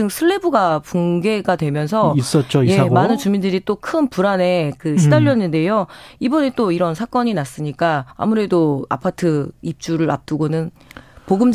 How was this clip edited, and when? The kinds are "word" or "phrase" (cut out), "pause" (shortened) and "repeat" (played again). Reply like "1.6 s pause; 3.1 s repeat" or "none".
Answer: 8.1 s pause